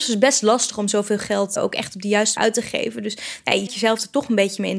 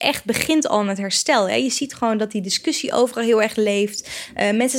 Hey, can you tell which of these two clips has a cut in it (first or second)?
first